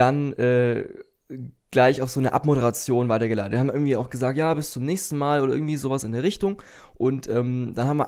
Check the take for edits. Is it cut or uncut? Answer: uncut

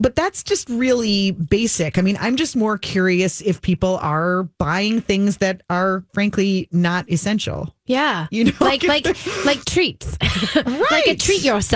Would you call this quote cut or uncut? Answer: cut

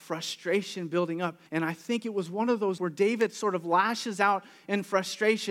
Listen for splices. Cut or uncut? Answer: cut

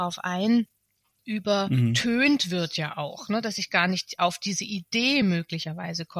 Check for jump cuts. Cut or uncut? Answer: uncut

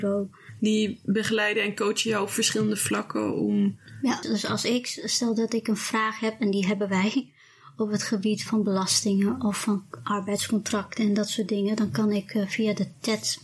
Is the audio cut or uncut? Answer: cut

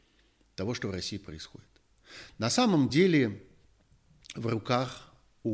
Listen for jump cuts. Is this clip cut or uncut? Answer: uncut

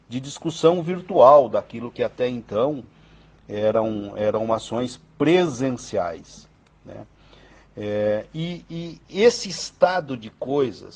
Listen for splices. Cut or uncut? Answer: uncut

